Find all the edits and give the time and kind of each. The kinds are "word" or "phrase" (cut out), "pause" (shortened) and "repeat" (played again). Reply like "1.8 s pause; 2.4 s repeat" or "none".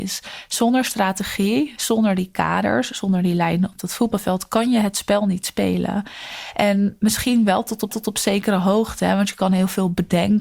7.9 s repeat